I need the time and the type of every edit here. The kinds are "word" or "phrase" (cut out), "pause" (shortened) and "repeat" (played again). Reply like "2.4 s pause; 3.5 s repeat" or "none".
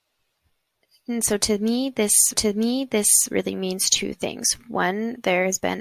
2.3 s repeat